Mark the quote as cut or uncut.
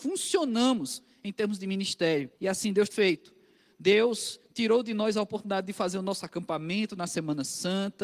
cut